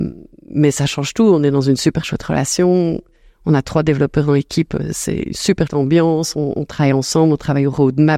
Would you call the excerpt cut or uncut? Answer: cut